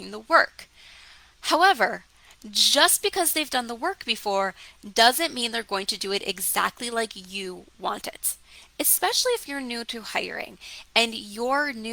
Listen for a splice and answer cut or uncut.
uncut